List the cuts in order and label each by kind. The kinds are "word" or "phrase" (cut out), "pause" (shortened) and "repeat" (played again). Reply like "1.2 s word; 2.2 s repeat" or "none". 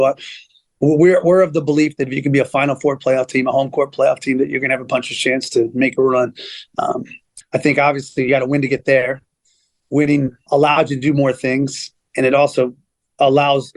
7.4 s word; 10.5 s word